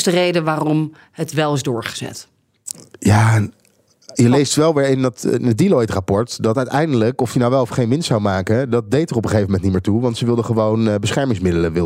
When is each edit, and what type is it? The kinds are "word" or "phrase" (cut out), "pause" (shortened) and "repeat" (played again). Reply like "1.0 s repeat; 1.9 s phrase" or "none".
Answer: none